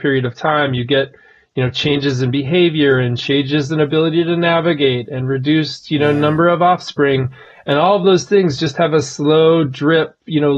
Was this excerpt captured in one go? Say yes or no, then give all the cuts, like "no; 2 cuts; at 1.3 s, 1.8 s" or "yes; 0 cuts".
yes; 0 cuts